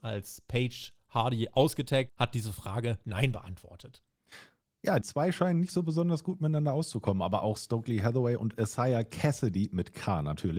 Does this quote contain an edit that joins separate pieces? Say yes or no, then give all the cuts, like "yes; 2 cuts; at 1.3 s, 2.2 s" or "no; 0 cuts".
yes; 3 cuts; at 2.1 s, 3.0 s, 5.0 s